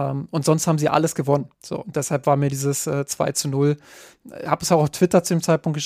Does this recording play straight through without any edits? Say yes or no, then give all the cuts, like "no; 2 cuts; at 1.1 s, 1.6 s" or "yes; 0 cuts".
no; 1 cut; at 1.5 s